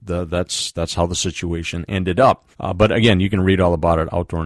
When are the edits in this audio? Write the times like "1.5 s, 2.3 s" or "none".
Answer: 2.5 s